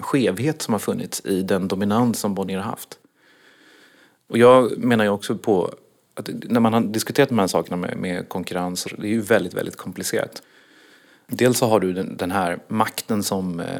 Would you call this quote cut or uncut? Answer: cut